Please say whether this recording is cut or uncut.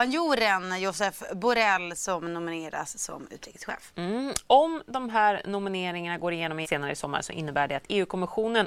cut